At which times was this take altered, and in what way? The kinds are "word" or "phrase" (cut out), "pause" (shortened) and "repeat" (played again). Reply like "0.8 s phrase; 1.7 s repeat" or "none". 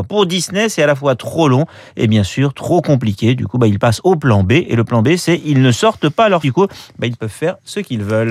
6.4 s phrase